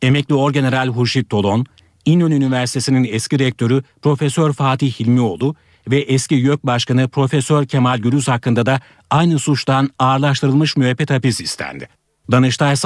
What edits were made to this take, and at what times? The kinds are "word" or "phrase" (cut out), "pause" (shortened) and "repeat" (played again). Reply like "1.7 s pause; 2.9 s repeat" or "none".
none